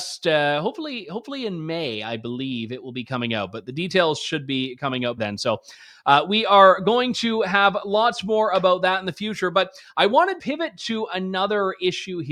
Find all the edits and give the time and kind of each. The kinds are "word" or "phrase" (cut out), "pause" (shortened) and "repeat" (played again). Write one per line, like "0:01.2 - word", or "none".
0:05.2 - word
0:10.4 - word